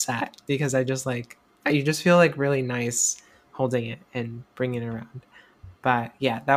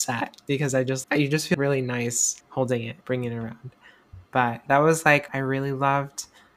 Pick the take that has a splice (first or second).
second